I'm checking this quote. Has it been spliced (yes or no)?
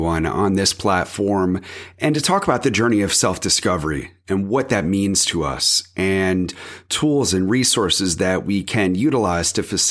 no